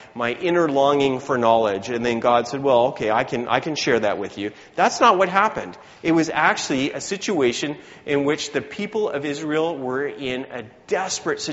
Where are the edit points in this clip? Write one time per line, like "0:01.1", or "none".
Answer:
none